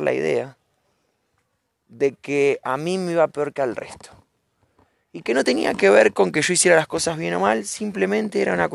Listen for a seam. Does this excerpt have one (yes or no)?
no